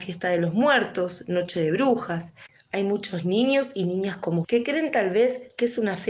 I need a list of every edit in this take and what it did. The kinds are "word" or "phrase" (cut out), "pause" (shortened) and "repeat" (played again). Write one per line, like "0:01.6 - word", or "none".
0:04.4 - word